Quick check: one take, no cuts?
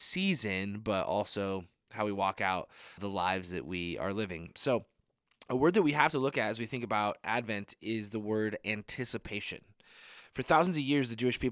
no; 1 cut; at 3.0 s

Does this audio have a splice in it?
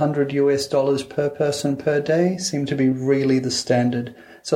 no; 0 cuts

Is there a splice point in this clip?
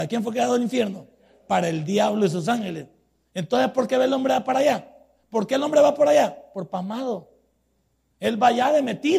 no; 0 cuts

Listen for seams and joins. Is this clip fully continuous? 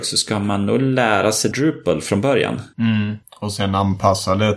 no; 1 cut; at 1.5 s

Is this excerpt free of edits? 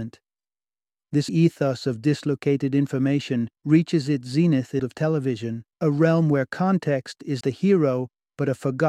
no; 5 cuts; at 1.3 s, 3.6 s, 4.8 s, 5.7 s, 7.4 s

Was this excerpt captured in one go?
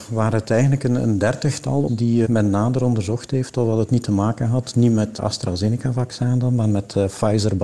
no; 3 cuts; at 1.9 s, 2.2 s, 5.2 s

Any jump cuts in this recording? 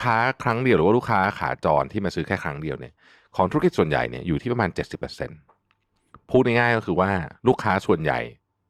no; 0 cuts

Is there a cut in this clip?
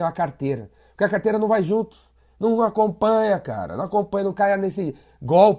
no; 0 cuts

